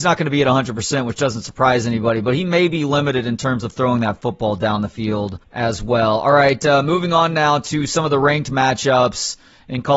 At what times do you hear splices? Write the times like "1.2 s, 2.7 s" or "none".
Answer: 5.4 s